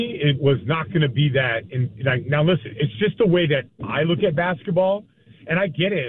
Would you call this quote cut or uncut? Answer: uncut